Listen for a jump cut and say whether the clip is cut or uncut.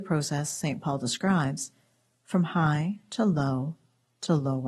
uncut